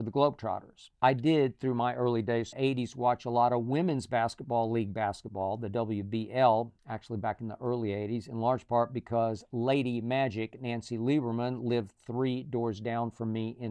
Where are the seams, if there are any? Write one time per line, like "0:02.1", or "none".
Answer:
0:00.9
0:02.5
0:06.8